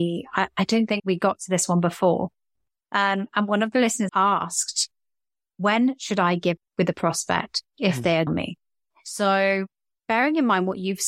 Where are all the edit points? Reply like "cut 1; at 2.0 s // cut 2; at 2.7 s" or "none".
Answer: cut 1; at 1.0 s // cut 2; at 4.1 s // cut 3; at 6.6 s // cut 4; at 8.3 s